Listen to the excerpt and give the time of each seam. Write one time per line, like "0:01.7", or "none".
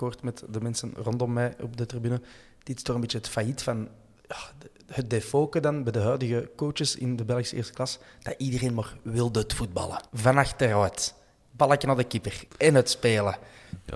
0:04.2
0:10.1
0:12.5